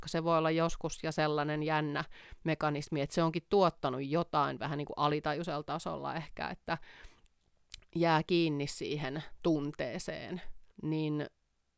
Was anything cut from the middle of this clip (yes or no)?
yes